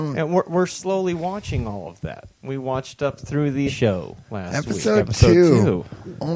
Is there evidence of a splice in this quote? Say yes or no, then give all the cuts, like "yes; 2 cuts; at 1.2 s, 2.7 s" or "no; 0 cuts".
yes; 3 cuts; at 2.3 s, 3.7 s, 4.2 s